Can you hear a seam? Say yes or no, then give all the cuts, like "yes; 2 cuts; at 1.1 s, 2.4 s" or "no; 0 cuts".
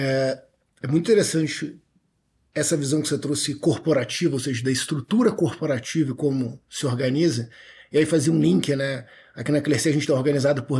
no; 0 cuts